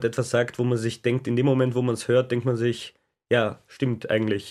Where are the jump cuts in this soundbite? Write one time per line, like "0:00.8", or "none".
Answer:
none

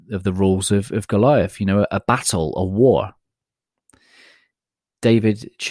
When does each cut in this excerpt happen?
none

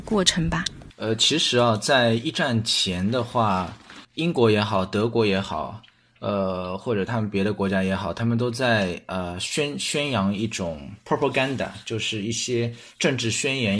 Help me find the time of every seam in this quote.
none

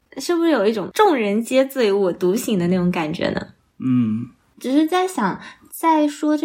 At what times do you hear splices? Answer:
0:03.6

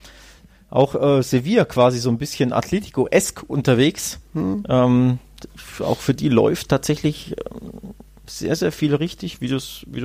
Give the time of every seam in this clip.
none

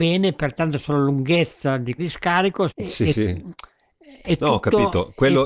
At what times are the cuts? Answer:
0:02.0
0:02.7

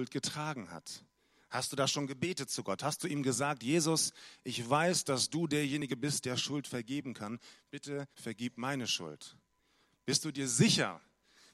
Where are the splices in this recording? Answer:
0:08.1

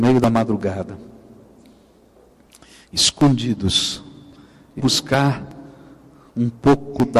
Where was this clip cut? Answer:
0:04.8

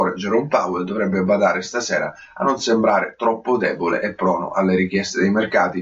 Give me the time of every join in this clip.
none

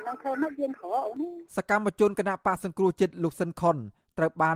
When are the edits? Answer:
0:01.5

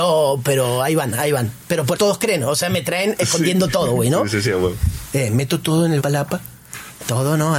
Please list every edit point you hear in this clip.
0:01.9
0:06.0

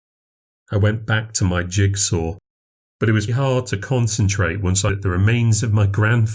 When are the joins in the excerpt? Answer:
0:03.3
0:04.9

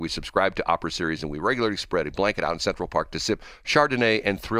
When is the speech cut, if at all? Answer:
none

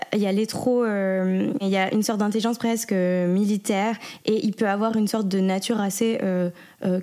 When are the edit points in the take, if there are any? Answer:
none

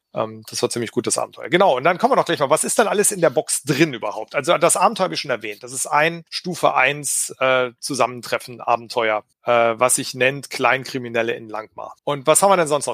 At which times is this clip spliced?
0:06.3
0:09.3
0:12.0

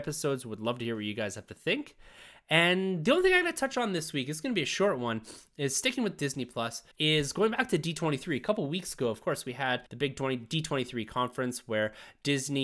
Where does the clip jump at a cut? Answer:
0:06.9
0:09.9

